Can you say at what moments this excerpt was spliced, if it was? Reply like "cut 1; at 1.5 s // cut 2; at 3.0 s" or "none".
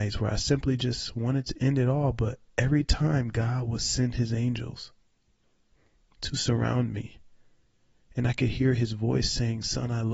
none